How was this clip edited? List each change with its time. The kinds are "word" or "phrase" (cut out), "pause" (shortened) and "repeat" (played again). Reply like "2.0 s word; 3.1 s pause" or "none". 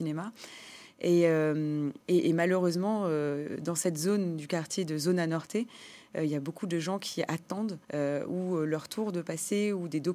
2.0 s pause; 7.8 s pause